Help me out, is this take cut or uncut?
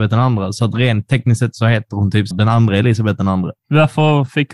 cut